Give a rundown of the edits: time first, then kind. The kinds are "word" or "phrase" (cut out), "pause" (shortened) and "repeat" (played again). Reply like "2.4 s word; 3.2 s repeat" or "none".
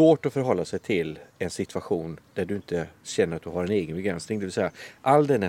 1.3 s pause